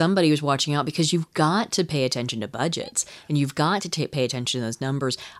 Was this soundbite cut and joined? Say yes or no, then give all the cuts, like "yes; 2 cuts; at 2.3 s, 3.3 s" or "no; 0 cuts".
no; 0 cuts